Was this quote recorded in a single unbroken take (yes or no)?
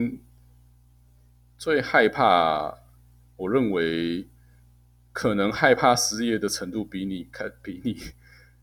yes